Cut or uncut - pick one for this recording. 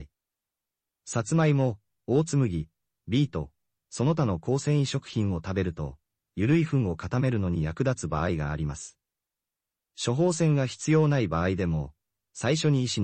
uncut